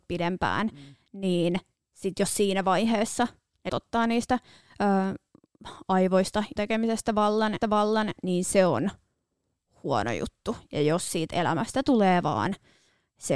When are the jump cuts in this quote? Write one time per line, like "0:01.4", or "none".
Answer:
0:01.8
0:03.7
0:06.6
0:07.6